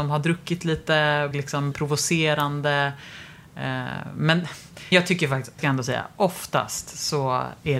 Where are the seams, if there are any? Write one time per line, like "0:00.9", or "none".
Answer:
0:01.3
0:01.7
0:04.9
0:05.6